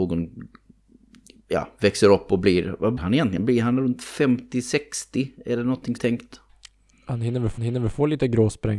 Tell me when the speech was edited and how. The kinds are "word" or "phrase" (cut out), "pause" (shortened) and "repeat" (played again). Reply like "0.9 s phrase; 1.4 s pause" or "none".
3.0 s word; 6.0 s phrase; 7.6 s repeat